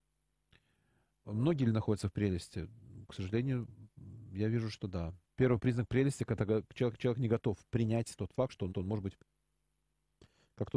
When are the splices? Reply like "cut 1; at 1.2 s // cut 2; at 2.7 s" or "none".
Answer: cut 1; at 5.2 s // cut 2; at 6.9 s // cut 3; at 8.7 s // cut 4; at 9.2 s